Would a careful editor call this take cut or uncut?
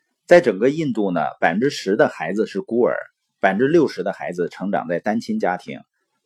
uncut